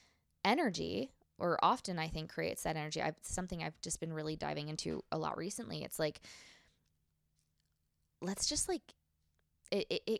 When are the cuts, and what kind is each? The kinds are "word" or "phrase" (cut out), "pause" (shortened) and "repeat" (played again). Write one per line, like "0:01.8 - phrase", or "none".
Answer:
none